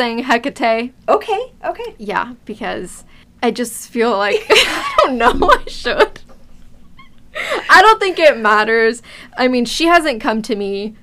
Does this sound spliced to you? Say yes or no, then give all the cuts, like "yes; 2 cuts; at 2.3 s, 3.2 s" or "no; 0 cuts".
no; 0 cuts